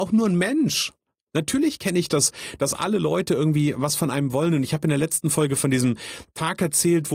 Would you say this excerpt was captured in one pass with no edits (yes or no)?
yes